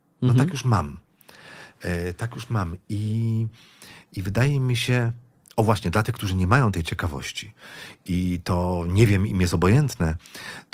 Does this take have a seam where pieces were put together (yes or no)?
no